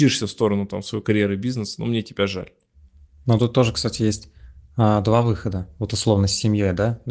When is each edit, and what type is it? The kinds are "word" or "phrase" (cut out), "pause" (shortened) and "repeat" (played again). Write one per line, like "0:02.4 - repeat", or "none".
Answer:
none